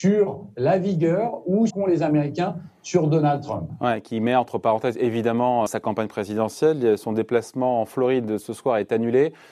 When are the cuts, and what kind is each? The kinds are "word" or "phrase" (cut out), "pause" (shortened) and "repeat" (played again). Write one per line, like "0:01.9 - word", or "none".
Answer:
0:01.7 - phrase
0:05.7 - word